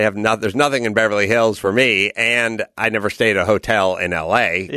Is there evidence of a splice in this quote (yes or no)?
no